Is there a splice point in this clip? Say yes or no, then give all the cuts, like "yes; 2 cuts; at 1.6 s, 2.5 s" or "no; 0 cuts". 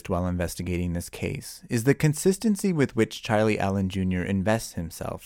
no; 0 cuts